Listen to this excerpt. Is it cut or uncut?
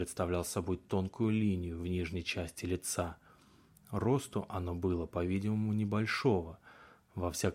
uncut